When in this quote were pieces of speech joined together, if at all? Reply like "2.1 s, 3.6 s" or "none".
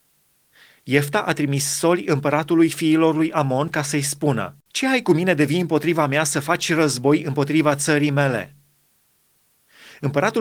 4.6 s